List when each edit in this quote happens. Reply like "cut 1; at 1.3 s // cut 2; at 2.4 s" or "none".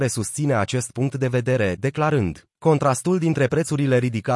cut 1; at 2.6 s